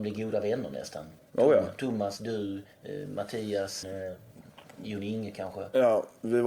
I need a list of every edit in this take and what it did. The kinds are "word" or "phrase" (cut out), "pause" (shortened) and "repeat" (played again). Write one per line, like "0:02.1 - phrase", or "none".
0:02.7 - pause
0:03.8 - word